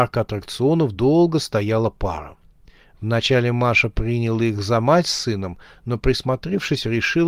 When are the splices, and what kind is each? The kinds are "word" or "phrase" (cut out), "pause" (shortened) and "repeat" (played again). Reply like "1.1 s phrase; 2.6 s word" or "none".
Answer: none